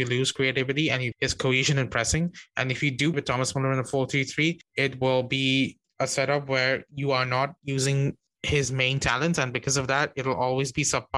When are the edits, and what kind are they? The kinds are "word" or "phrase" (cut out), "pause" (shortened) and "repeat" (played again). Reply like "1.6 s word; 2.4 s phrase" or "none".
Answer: 1.1 s word; 3.1 s word